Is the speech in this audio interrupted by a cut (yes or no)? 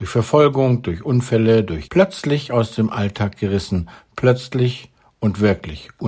yes